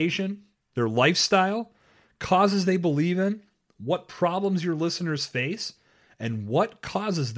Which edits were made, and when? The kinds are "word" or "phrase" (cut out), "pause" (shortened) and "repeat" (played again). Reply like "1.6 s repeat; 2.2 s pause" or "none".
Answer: none